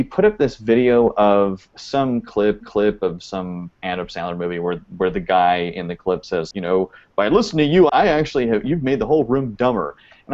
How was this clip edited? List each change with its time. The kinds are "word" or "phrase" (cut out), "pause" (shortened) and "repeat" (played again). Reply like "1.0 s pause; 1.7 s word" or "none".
2.6 s repeat; 6.5 s word; 7.9 s word